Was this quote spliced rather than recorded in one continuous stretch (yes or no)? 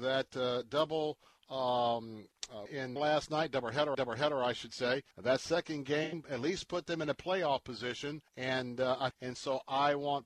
yes